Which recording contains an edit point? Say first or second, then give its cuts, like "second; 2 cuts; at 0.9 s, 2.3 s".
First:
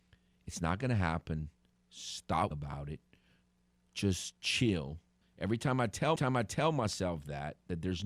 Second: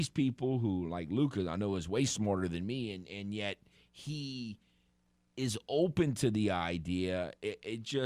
first; 3 cuts; at 2.5 s, 5.2 s, 6.2 s